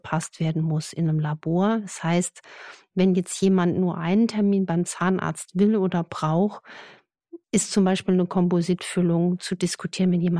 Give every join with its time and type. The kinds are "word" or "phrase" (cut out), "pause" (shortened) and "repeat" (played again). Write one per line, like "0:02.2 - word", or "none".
0:07.4 - pause